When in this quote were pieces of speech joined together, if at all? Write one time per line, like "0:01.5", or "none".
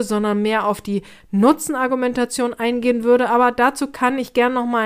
none